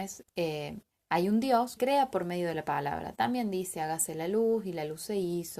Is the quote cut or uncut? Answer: cut